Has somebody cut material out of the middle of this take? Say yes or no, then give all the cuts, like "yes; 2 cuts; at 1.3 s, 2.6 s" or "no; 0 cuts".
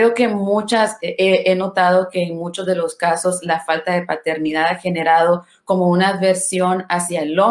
no; 0 cuts